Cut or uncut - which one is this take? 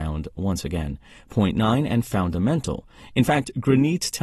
uncut